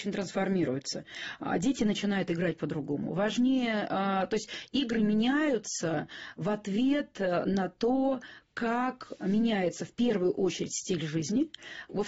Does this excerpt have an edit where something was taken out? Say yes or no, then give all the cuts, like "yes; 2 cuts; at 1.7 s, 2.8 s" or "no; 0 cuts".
no; 0 cuts